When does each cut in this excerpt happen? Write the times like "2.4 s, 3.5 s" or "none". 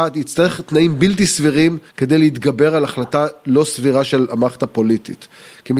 1.9 s